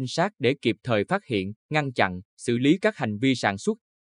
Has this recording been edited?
yes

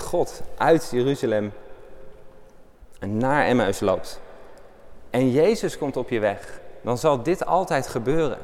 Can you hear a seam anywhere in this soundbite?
no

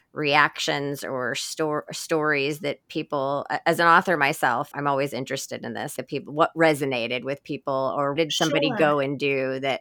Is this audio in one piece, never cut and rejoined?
no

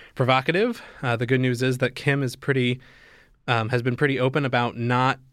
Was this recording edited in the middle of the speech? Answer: no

